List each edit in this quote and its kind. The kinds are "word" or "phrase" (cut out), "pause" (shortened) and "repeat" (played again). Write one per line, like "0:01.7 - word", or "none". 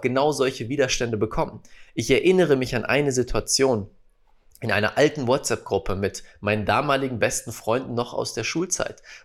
none